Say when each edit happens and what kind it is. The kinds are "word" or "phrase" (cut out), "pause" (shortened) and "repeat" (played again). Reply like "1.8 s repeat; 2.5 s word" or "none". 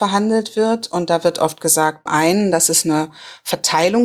2.1 s word